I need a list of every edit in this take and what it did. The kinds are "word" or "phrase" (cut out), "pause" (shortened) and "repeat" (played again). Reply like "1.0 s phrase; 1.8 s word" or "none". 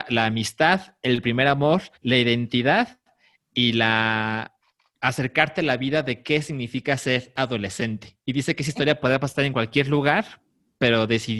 2.0 s pause; 8.2 s pause

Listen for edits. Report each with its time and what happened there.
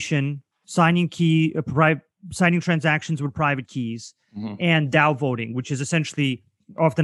none

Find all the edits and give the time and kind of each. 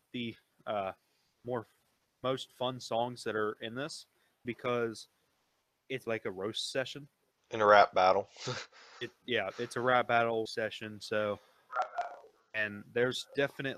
4.4 s word; 6.1 s word; 7.3 s pause; 10.5 s word

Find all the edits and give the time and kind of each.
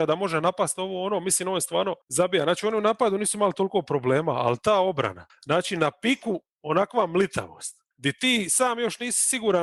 2.0 s pause; 5.3 s pause; 7.9 s pause

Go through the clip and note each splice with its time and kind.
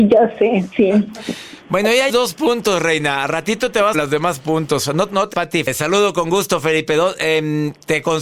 2.1 s word; 3.9 s phrase; 5.3 s word

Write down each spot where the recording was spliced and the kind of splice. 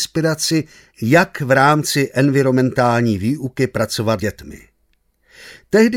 4.2 s word

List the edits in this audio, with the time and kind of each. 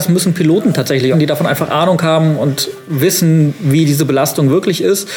1.1 s phrase

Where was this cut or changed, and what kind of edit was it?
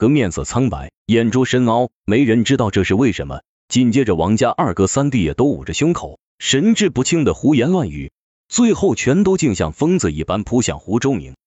1.0 s pause; 6.3 s pause

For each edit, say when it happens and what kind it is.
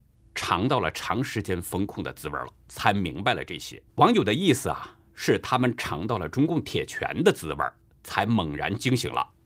3.9 s pause

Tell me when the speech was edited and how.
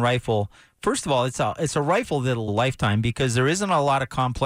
2.5 s phrase

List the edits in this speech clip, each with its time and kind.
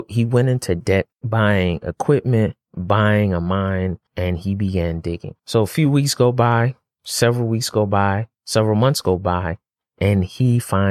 1.1 s pause; 2.6 s pause; 4.1 s pause; 5.4 s pause; 8.3 s pause

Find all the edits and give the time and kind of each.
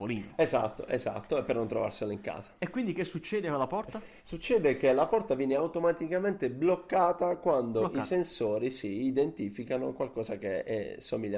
none

